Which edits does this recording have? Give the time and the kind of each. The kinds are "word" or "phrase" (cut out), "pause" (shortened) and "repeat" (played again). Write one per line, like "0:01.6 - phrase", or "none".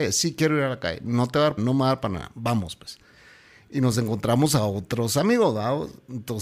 0:01.6 - word

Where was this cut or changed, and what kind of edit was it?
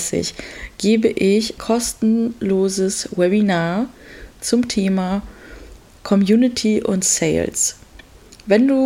0:01.6 - word

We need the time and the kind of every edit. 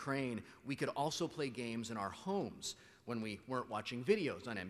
none

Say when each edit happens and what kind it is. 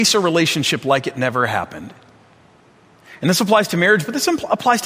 none

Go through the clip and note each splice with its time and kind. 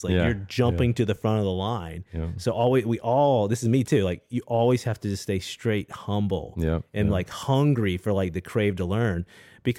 none

